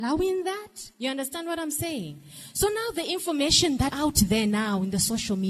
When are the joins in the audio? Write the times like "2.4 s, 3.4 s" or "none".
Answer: 0.9 s, 3.9 s